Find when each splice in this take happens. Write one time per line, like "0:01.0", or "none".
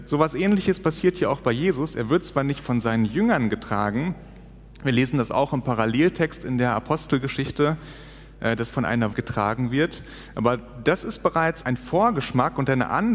0:08.7
0:09.1
0:11.6